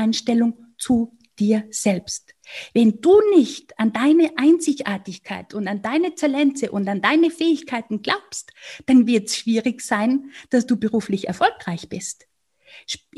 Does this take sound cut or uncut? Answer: uncut